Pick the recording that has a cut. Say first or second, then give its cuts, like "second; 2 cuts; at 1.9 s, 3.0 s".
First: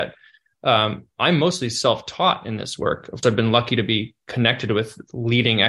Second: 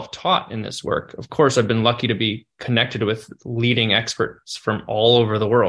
first; 1 cut; at 3.2 s